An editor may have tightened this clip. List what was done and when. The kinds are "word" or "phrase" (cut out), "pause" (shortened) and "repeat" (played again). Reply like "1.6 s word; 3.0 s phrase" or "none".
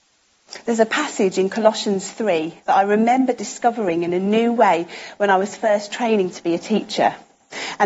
none